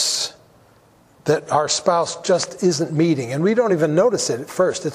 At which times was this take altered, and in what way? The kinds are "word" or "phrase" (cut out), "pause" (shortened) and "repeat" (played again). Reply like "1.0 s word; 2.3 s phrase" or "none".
none